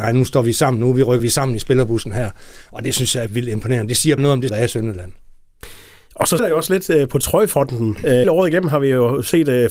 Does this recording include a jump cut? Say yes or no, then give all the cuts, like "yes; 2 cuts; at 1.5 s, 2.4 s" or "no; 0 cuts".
yes; 7 cuts; at 1.2 s, 3.3 s, 4.2 s, 4.5 s, 6.4 s, 7.1 s, 8.2 s